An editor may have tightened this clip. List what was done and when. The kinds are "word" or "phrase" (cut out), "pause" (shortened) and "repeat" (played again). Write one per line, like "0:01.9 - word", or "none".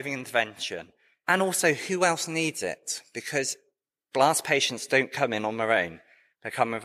none

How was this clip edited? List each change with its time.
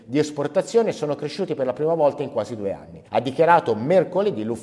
0:03.1 - pause

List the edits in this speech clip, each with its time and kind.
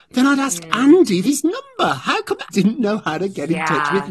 0:01.2 - word
0:02.5 - word

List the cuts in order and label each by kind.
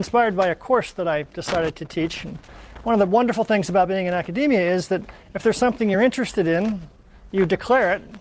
none

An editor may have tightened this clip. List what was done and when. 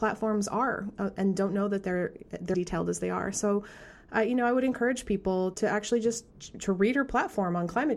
0:01.0 - word
0:02.5 - word
0:05.5 - word
0:06.3 - pause

